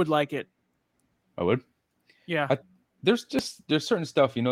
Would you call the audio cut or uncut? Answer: uncut